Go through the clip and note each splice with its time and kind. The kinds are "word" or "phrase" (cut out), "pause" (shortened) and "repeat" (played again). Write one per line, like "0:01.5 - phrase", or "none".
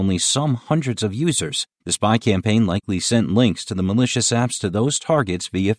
0:01.7 - pause